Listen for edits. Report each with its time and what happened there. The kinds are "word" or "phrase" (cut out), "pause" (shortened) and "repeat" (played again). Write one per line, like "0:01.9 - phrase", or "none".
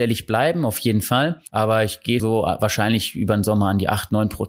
0:02.2 - word